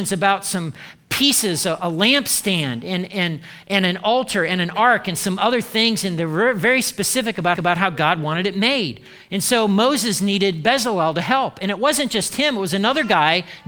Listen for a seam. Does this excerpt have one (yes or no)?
yes